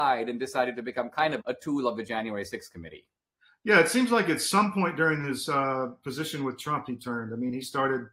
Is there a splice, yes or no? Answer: yes